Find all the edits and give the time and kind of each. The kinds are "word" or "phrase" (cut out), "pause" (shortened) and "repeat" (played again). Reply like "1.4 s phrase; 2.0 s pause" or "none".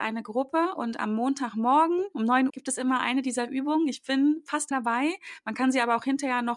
2.5 s word; 4.7 s word